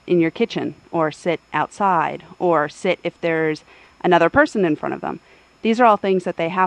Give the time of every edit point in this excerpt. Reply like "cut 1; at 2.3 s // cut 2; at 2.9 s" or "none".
none